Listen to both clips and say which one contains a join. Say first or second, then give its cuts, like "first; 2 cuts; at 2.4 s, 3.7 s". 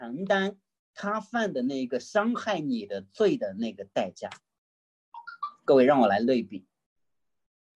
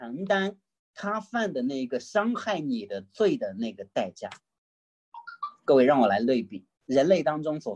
second; 1 cut; at 6.8 s